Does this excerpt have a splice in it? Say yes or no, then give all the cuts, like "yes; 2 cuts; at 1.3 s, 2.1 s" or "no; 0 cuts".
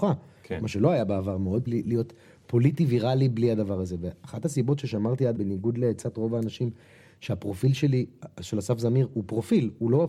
yes; 2 cuts; at 1.7 s, 5.4 s